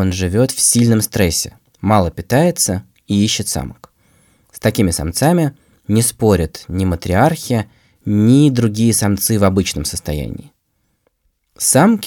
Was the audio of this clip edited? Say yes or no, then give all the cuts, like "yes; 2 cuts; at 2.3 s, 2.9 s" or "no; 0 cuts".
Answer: no; 0 cuts